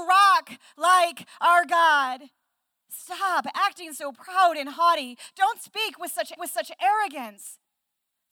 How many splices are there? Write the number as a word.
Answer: one